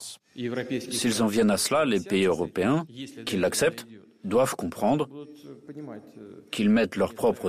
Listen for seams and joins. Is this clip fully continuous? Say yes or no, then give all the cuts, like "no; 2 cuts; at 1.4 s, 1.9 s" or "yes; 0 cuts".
yes; 0 cuts